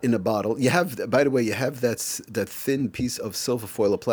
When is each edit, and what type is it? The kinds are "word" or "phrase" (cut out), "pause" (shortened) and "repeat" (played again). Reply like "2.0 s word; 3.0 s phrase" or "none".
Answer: none